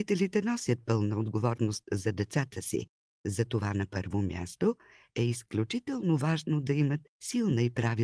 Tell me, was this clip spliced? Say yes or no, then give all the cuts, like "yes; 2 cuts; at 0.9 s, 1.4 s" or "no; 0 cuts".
no; 0 cuts